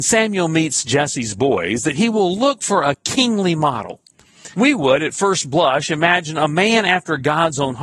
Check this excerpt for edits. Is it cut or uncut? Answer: cut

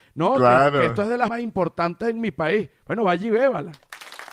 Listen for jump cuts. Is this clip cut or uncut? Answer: cut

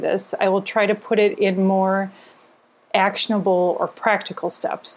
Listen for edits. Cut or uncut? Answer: uncut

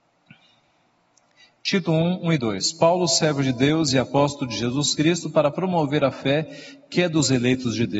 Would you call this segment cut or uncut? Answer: uncut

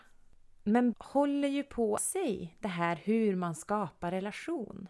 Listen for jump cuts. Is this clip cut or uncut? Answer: cut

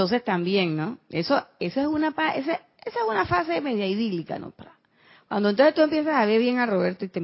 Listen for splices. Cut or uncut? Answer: uncut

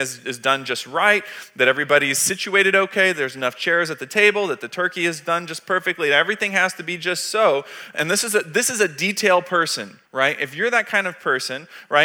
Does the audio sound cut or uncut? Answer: cut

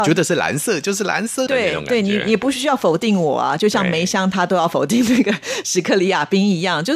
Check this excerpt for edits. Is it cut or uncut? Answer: cut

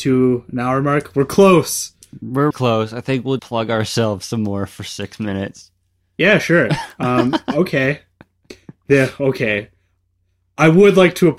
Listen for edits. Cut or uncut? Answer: cut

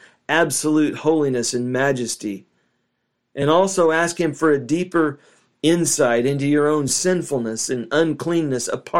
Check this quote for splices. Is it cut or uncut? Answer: uncut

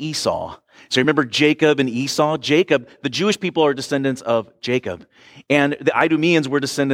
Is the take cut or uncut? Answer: uncut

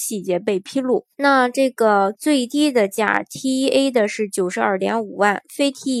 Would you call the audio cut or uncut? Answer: cut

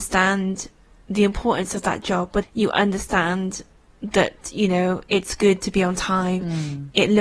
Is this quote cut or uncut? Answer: cut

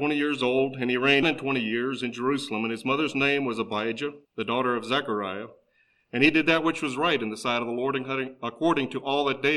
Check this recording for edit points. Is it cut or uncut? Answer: cut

